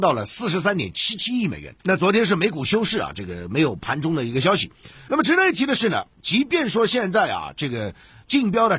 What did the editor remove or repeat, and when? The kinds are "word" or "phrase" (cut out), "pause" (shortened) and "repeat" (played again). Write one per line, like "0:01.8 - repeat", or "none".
0:01.8 - pause